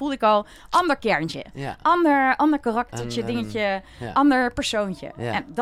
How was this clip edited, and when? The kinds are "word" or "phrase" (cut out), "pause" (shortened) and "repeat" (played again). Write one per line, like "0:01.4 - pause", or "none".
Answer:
none